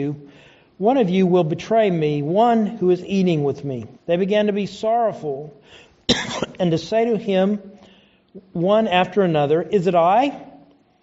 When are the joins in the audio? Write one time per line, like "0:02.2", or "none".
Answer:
0:04.0

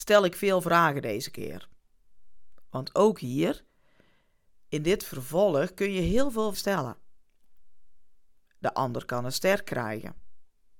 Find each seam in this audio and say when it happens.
0:06.5

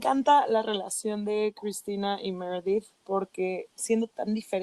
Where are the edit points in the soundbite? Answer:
none

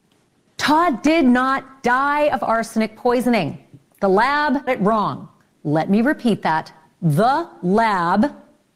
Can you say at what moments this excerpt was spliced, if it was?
0:04.7

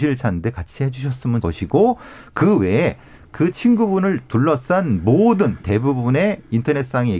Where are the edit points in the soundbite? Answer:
0:01.4
0:05.6

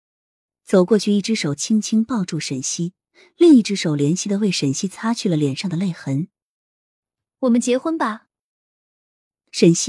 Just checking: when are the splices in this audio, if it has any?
none

